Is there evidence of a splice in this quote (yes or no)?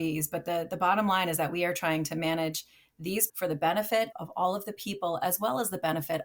yes